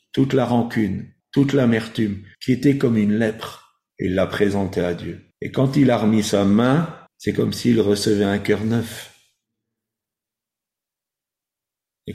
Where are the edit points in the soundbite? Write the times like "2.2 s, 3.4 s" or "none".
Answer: 1.2 s, 2.3 s, 3.9 s, 5.3 s, 7.1 s

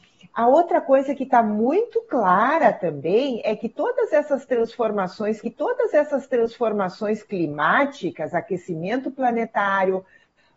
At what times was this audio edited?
5.4 s

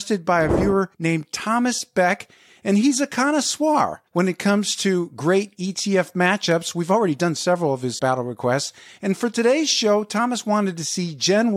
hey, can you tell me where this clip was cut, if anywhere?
0.9 s, 4.1 s, 8.0 s

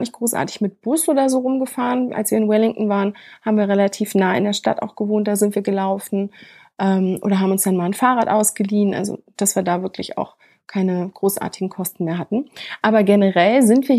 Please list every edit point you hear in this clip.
none

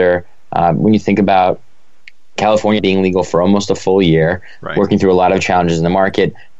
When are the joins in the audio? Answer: 2.8 s

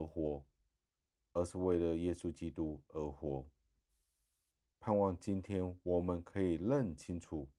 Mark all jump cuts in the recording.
none

